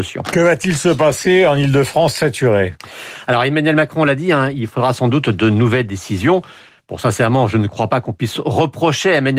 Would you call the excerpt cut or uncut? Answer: uncut